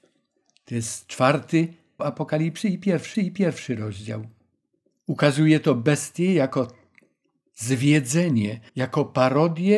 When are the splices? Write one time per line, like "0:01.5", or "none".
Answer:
0:02.0
0:03.1
0:08.7